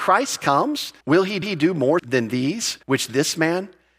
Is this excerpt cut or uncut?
cut